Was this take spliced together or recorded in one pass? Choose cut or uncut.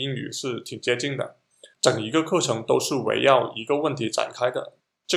cut